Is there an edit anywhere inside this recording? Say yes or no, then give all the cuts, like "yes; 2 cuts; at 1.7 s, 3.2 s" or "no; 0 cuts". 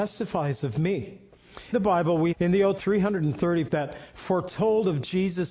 yes; 4 cuts; at 1.7 s, 2.3 s, 2.8 s, 3.7 s